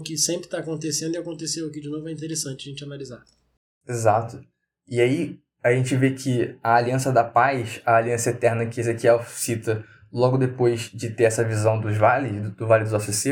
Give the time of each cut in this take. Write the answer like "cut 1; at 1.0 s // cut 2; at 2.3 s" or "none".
none